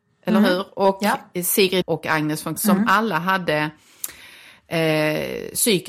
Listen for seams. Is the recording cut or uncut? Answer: cut